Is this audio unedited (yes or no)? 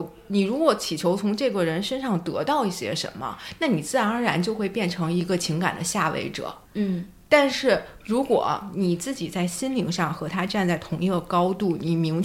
no